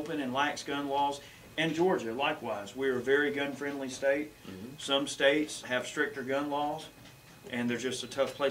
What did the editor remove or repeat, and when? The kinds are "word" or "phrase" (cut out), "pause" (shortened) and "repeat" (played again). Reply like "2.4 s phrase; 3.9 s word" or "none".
5.6 s word